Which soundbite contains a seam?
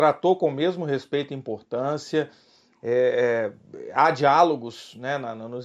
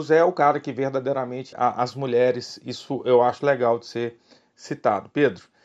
second; 1 cut; at 1.5 s

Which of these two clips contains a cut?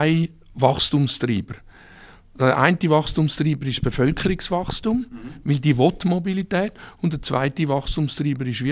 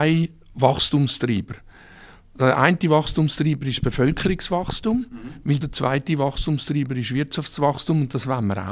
second; 1 cut; at 5.6 s

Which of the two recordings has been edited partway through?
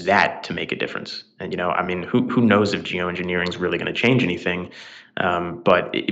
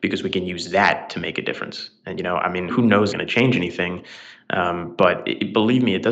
second; 2 cuts; at 2.7 s, 3.1 s

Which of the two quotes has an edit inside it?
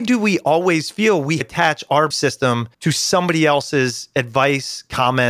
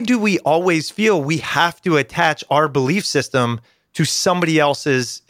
first; 3 cuts; at 1.4 s, 2.1 s, 2.7 s

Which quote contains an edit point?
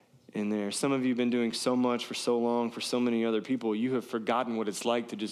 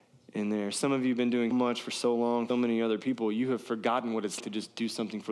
second; 3 cuts; at 1.5 s, 2.5 s, 4.4 s

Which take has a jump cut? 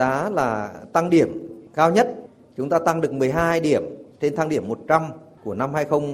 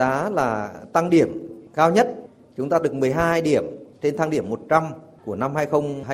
second; 1 cut; at 2.8 s

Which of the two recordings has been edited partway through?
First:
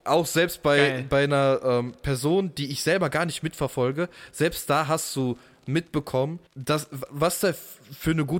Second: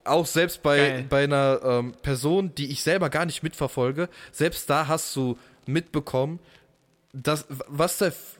first; 1 cut; at 6.5 s

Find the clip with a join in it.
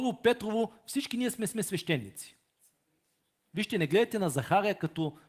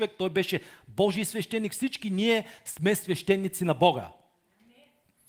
first; 1 cut; at 1.5 s

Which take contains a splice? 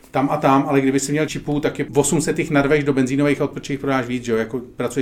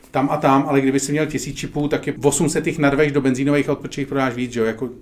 first; 1 cut; at 1.3 s

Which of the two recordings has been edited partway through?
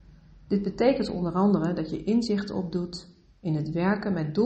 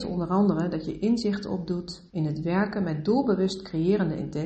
second; 1 cut; at 2.1 s

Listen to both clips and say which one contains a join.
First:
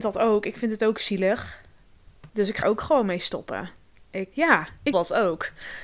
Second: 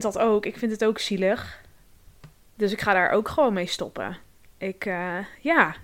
first; 4 cuts; at 2.3 s, 2.6 s, 4.3 s, 4.9 s

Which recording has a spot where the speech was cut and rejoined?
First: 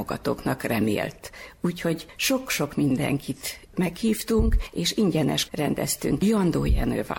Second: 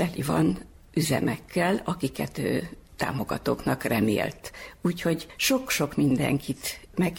first; 1 cut; at 5.5 s

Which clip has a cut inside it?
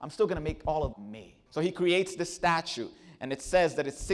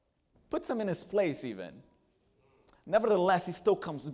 first; 2 cuts; at 0.9 s, 1.5 s

